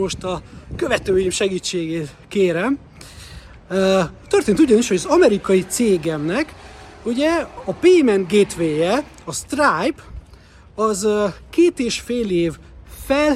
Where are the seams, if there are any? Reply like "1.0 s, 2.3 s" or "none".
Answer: none